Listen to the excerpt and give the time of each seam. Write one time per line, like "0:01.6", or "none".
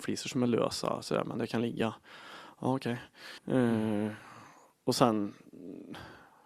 0:03.4